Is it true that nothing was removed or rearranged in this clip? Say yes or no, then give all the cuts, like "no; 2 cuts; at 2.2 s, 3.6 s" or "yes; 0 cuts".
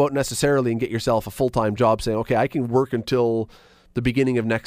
yes; 0 cuts